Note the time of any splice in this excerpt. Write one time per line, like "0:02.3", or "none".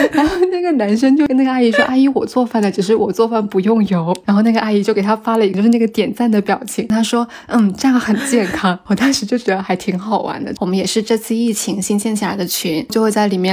none